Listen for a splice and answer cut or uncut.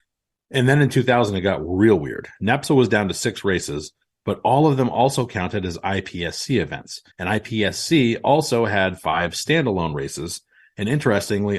cut